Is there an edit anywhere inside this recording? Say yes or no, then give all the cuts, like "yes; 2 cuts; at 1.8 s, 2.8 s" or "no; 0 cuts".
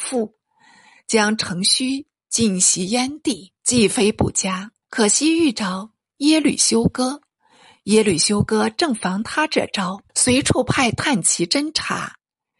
yes; 3 cuts; at 3.6 s, 4.8 s, 10.1 s